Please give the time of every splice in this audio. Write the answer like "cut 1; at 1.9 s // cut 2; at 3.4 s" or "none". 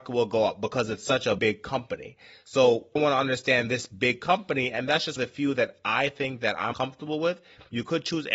cut 1; at 1.4 s // cut 2; at 3.0 s // cut 3; at 5.2 s // cut 4; at 6.7 s